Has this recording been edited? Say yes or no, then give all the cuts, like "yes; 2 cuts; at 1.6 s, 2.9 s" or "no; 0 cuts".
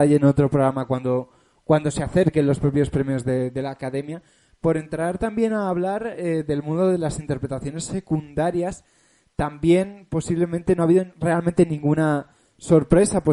no; 0 cuts